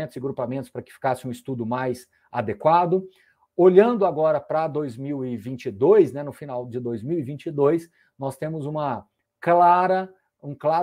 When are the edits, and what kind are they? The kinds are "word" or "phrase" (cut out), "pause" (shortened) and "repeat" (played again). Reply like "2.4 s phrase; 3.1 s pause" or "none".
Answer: none